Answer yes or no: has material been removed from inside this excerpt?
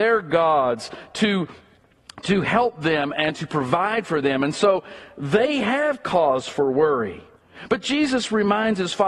no